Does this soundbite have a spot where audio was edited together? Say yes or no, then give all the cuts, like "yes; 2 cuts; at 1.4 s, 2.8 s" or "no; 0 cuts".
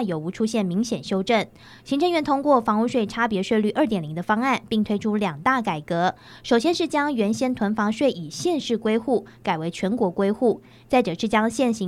no; 0 cuts